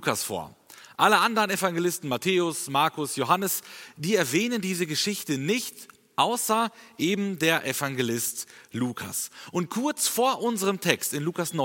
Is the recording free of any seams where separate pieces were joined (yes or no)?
yes